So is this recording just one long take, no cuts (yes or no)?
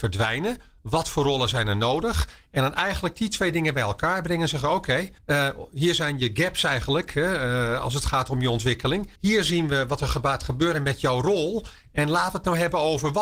no